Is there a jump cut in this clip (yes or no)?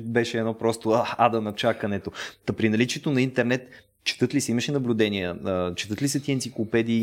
no